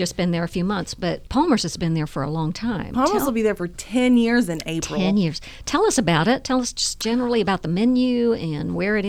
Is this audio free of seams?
no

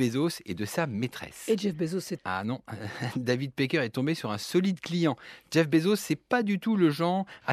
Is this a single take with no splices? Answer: no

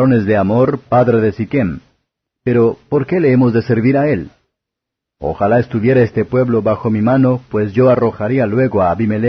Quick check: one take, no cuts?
yes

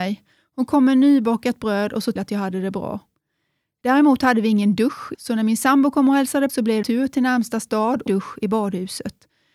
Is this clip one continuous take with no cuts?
no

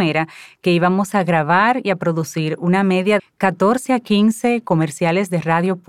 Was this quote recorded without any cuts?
no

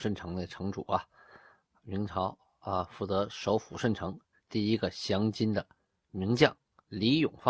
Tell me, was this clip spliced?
no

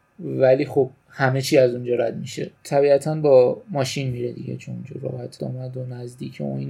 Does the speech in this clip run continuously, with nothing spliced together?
no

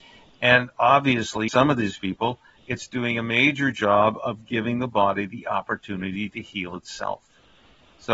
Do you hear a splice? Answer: yes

